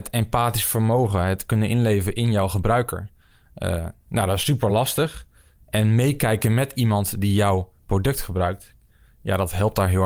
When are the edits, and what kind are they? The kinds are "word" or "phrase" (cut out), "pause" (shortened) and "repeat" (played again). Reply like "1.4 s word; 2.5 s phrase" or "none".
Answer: none